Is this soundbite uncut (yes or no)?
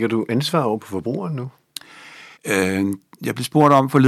no